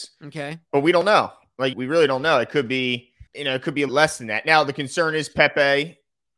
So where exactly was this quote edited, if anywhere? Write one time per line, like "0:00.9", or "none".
0:01.7
0:03.3
0:03.9